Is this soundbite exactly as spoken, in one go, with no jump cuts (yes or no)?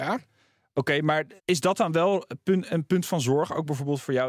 no